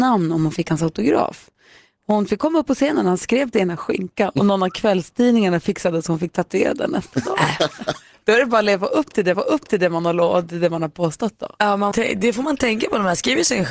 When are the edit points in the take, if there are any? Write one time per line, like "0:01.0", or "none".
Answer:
0:03.5
0:09.3
0:11.9